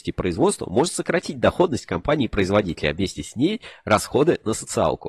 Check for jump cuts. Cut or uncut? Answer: uncut